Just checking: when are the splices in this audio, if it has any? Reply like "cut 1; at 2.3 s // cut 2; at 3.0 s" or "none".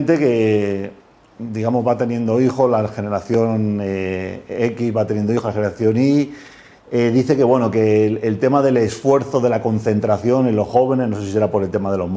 none